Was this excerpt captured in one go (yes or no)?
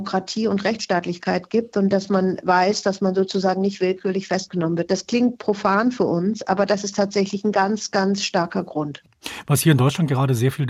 yes